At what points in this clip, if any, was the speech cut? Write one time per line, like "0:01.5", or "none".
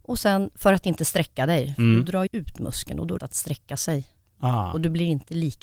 0:02.3
0:03.2